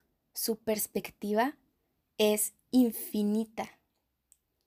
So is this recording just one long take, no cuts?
yes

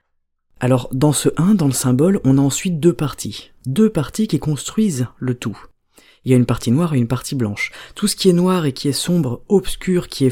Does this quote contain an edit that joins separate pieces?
yes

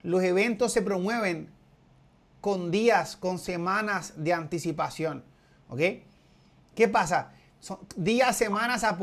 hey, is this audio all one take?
yes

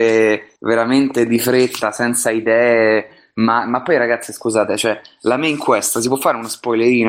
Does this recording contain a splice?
no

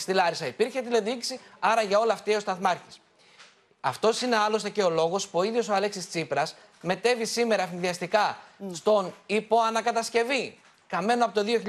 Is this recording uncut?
yes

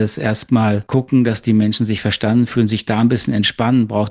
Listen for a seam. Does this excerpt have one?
no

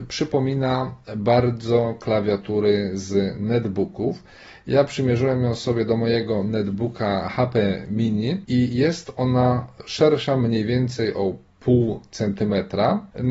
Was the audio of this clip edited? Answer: no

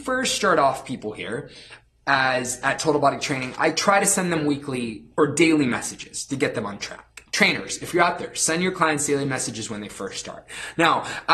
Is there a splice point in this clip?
no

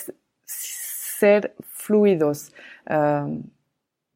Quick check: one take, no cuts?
yes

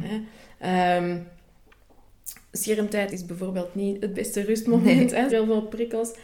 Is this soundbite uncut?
no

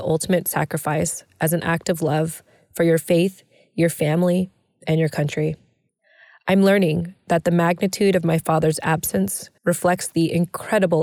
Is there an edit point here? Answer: yes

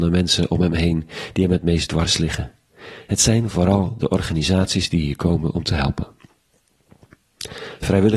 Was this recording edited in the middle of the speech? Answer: no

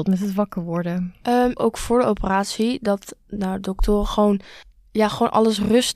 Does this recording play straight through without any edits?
no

